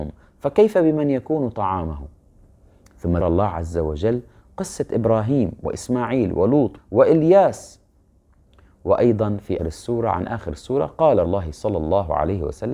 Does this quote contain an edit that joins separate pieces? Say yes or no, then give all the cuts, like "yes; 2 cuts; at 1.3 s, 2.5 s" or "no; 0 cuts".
yes; 4 cuts; at 3.2 s, 6.8 s, 9.6 s, 11.2 s